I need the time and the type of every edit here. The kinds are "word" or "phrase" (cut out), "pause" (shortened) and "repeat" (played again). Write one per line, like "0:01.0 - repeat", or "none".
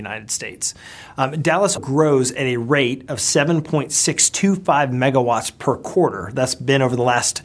0:01.8 - word